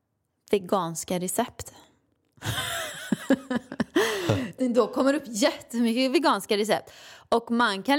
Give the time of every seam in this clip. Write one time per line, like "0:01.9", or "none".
0:04.6